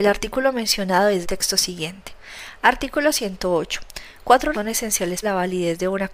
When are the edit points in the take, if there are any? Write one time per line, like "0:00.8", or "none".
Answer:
0:01.2
0:04.5
0:05.2